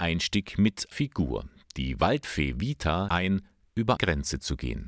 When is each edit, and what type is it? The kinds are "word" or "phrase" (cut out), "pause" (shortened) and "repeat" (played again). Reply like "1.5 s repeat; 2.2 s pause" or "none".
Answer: 0.9 s word; 3.1 s word; 4.0 s word